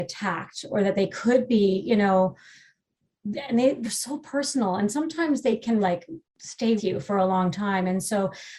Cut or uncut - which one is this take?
cut